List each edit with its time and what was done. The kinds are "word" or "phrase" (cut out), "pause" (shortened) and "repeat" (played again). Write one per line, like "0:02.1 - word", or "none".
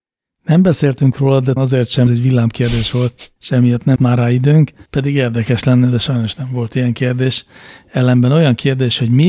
0:01.6 - word
0:02.1 - phrase
0:03.4 - pause
0:04.0 - word
0:04.9 - pause